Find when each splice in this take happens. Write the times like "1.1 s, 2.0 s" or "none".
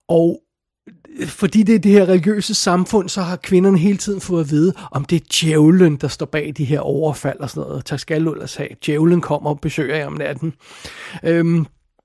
none